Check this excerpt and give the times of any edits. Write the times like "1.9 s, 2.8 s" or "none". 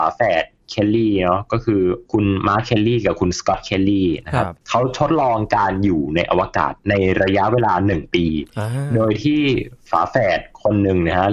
2.0 s